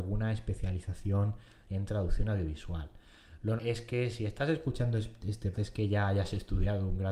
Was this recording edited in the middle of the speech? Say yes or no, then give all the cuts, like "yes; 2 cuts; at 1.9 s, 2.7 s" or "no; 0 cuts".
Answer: yes; 2 cuts; at 3.6 s, 5.5 s